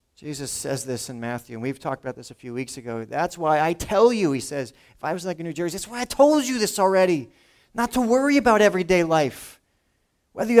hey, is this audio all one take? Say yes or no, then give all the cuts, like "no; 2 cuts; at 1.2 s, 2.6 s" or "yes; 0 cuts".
yes; 0 cuts